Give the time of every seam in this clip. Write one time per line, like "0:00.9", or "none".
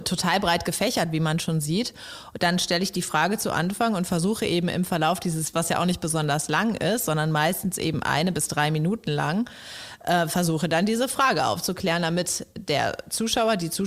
0:05.5